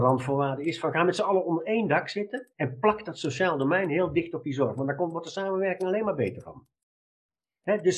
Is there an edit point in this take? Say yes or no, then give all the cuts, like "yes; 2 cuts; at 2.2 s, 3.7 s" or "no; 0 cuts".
yes; 1 cut; at 2.5 s